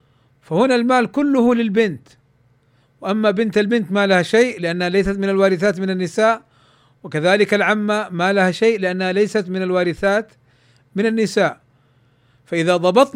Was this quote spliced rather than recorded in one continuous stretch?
no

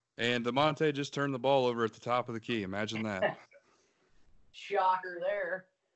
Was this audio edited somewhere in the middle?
no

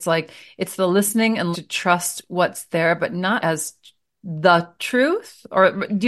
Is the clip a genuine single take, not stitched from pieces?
no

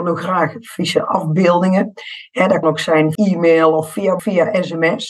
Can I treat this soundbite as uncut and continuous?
no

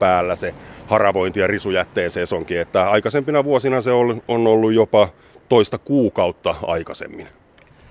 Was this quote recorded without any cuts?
yes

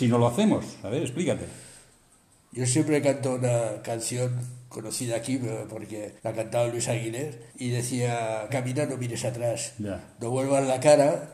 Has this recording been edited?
yes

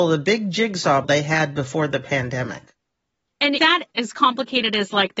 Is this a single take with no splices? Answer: no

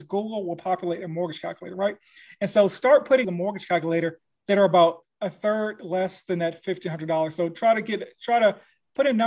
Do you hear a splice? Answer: yes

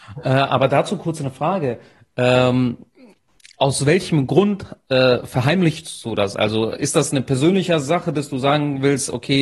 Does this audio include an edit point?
no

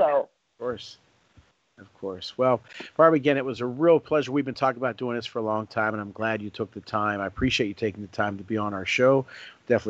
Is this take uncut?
yes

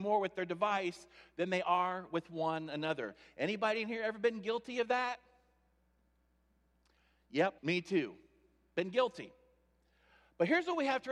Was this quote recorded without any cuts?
no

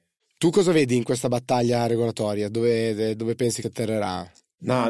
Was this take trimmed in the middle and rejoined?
yes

